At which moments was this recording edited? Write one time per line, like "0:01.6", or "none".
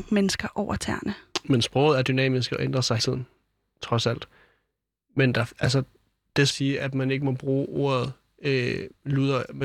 0:03.0
0:06.5